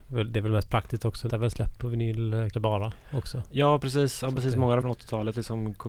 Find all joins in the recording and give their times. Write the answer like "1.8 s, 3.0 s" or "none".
1.3 s, 2.5 s, 4.8 s